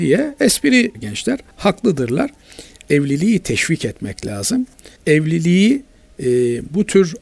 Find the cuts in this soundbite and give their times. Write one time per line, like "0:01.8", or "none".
0:00.9
0:01.5
0:05.0